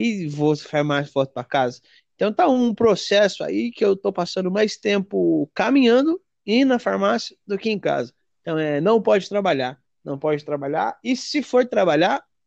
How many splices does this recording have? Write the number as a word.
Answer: zero